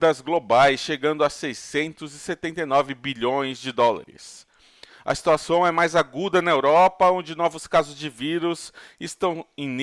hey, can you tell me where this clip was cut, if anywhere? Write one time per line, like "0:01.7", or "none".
none